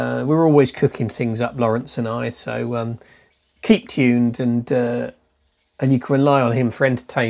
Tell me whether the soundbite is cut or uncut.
uncut